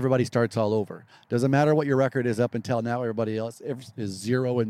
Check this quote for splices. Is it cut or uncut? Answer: uncut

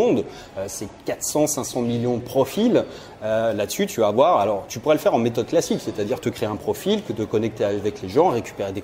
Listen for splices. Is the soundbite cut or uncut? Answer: uncut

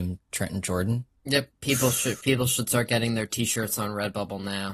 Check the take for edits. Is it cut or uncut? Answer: cut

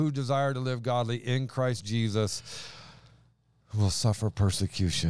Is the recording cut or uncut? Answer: uncut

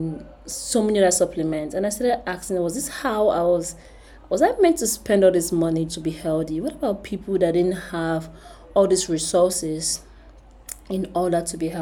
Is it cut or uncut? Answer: cut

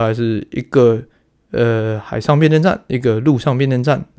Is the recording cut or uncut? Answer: uncut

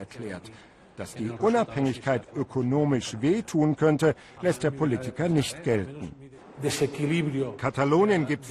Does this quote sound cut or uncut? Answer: uncut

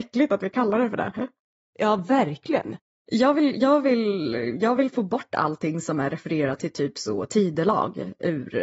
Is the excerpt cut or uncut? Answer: uncut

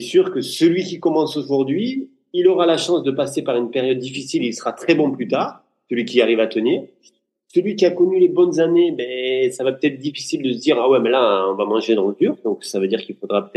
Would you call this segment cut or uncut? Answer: uncut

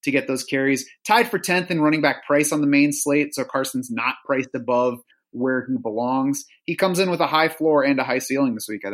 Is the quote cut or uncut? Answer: uncut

